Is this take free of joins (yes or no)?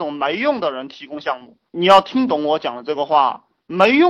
yes